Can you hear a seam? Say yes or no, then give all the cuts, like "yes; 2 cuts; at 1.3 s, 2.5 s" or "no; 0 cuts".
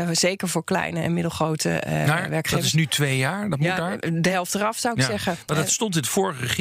no; 0 cuts